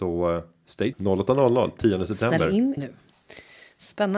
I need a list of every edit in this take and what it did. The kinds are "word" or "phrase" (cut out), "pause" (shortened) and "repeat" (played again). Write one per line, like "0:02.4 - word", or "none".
0:00.9 - word
0:02.8 - phrase